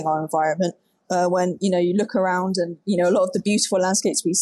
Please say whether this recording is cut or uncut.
uncut